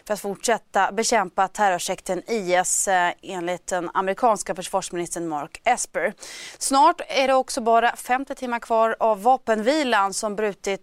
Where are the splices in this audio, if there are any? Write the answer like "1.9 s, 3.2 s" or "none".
none